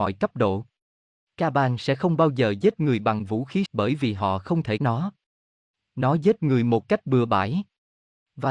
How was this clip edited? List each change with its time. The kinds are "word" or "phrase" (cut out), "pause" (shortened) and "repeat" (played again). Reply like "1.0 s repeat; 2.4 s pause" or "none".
3.7 s phrase; 4.8 s phrase